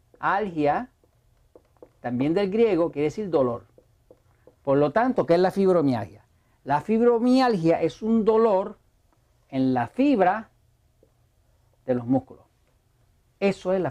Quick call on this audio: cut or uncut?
uncut